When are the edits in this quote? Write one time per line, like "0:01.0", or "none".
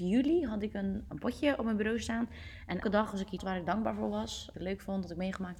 0:01.1
0:02.8
0:03.4
0:04.5